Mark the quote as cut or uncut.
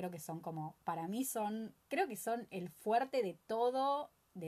cut